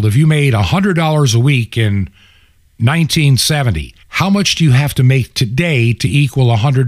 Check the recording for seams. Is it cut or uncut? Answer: cut